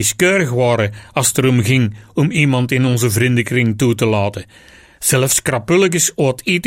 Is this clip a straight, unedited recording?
yes; 0 cuts

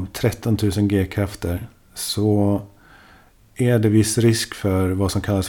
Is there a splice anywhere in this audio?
no; 0 cuts

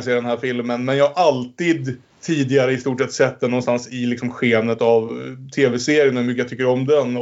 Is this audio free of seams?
no; 1 cut; at 2.1 s

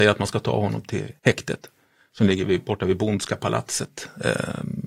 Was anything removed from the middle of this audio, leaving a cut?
yes; 1 cut; at 1.2 s

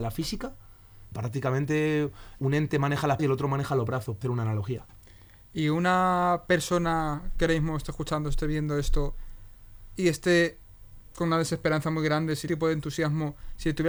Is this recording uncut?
no; 5 cuts; at 1.1 s, 2.4 s, 3.2 s, 4.2 s, 12.5 s

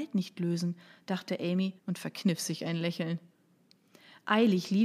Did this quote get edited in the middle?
yes; 1 cut; at 1.8 s

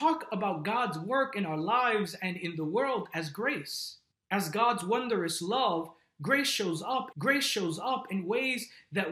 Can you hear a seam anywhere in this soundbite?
yes; 2 cuts; at 4.1 s, 7.1 s

